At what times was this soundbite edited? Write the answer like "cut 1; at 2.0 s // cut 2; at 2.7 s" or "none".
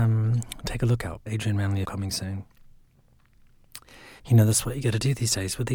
cut 1; at 1.3 s // cut 2; at 1.8 s // cut 3; at 4.2 s